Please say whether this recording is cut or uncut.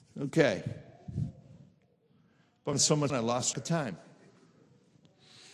cut